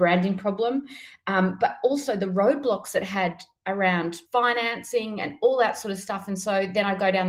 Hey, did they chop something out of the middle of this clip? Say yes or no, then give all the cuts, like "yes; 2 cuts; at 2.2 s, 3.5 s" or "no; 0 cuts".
yes; 1 cut; at 4.3 s